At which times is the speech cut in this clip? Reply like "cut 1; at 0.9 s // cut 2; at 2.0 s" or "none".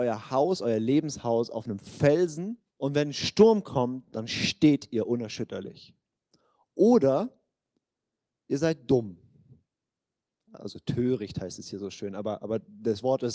cut 1; at 2.7 s